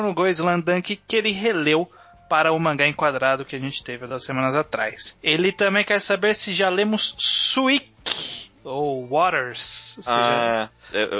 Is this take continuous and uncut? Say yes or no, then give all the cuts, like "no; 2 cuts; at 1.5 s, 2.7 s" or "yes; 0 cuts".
yes; 0 cuts